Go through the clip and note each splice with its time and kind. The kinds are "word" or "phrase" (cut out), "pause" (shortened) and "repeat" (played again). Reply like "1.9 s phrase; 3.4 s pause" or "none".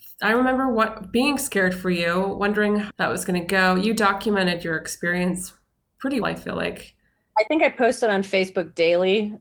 2.9 s phrase; 6.2 s word